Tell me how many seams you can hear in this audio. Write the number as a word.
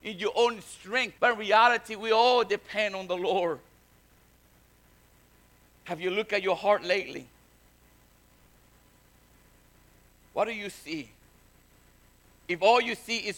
one